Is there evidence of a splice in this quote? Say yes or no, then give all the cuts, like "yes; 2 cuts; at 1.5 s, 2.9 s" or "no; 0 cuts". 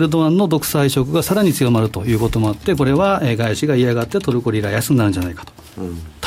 no; 0 cuts